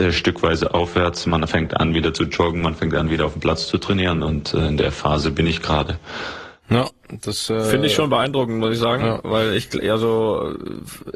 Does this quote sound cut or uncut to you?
uncut